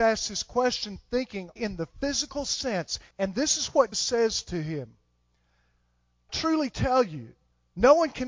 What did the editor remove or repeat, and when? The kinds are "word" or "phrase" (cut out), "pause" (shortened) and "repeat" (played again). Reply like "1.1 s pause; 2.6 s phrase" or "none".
1.6 s word; 3.1 s pause; 3.9 s word; 6.3 s word